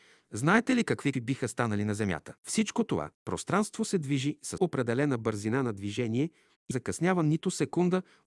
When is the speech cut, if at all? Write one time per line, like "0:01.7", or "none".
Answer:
0:01.1
0:02.4
0:03.1
0:04.6
0:06.7